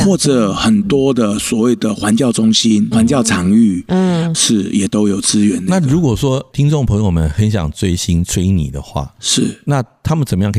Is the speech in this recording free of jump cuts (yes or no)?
no